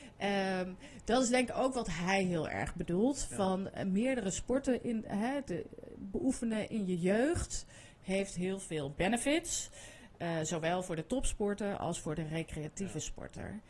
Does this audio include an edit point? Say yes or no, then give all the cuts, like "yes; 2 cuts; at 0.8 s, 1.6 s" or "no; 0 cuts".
no; 0 cuts